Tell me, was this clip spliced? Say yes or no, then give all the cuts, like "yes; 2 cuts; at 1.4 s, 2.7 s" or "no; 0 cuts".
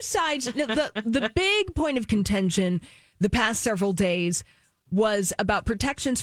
no; 0 cuts